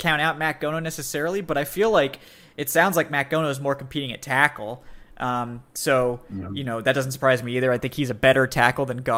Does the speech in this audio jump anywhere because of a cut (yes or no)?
no